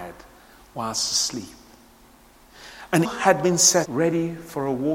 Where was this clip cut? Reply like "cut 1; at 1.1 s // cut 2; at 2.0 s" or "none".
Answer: cut 1; at 3.0 s // cut 2; at 3.8 s